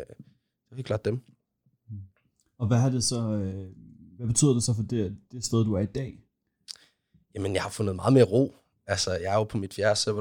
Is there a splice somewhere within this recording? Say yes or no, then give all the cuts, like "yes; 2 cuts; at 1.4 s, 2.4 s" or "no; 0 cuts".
no; 0 cuts